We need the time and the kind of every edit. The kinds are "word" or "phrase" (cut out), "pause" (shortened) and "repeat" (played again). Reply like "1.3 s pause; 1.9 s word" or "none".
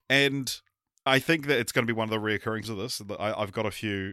1.1 s word; 2.6 s word